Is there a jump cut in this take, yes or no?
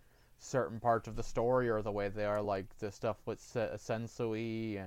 no